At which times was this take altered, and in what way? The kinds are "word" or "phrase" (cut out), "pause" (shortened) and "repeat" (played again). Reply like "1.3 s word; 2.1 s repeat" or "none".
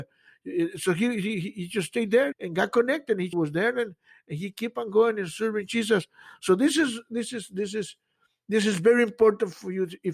2.3 s word; 3.3 s phrase